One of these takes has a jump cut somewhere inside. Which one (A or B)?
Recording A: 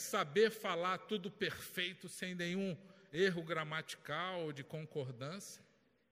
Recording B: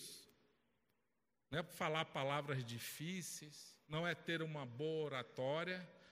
B